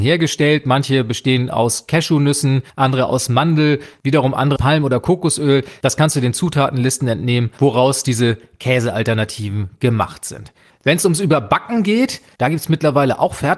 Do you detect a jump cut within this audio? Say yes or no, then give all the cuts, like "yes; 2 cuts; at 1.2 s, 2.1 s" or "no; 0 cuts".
yes; 2 cuts; at 2.7 s, 4.6 s